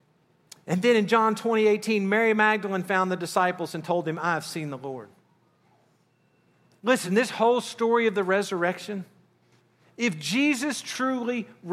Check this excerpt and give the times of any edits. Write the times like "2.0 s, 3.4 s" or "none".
none